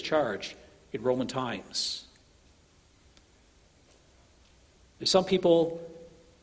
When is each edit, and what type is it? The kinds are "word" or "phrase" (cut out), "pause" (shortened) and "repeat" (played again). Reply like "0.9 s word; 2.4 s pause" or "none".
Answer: none